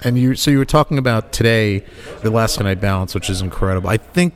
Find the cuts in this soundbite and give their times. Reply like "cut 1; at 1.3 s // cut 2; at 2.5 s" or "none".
cut 1; at 2.2 s // cut 2; at 2.6 s